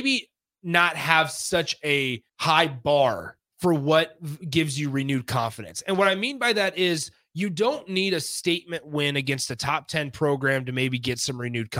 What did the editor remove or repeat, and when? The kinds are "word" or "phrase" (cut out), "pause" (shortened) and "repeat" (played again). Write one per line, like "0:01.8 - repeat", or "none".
0:02.3 - pause